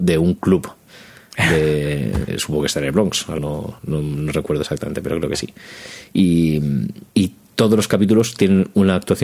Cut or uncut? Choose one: cut